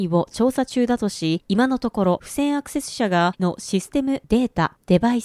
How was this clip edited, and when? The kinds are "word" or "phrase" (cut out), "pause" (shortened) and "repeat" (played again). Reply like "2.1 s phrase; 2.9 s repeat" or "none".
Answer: 3.4 s word